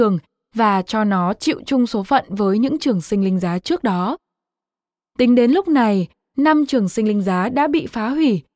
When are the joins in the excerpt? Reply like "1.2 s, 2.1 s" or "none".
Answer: none

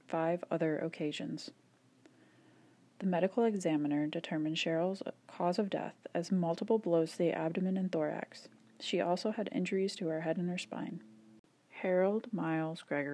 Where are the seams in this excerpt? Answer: none

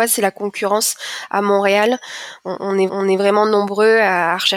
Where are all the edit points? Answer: 2.9 s

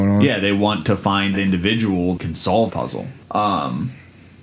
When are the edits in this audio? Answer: 1.3 s, 2.2 s, 2.7 s, 3.2 s

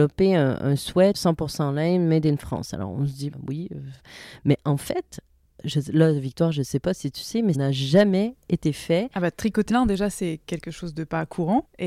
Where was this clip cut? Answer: 1.1 s, 3.3 s, 7.5 s, 9.7 s

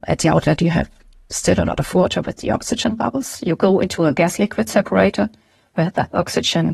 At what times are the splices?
none

